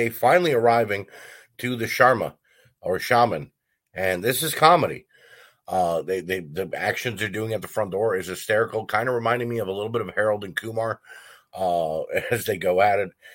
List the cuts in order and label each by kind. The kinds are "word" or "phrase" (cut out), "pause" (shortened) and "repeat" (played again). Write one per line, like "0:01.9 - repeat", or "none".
none